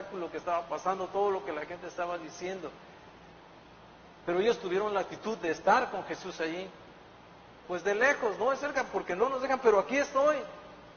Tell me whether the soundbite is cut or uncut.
uncut